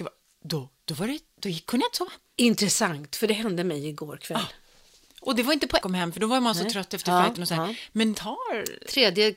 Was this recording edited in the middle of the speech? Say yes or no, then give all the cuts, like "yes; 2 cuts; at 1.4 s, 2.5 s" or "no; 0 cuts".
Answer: yes; 2 cuts; at 5.8 s, 8.1 s